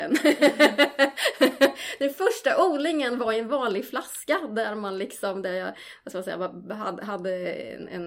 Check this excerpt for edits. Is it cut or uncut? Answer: uncut